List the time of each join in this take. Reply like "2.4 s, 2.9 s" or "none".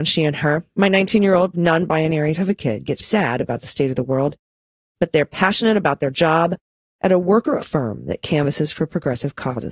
1.5 s, 2.4 s, 3.0 s, 7.6 s